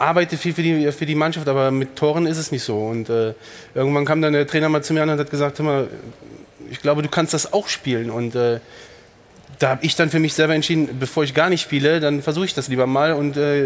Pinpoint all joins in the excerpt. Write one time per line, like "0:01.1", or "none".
none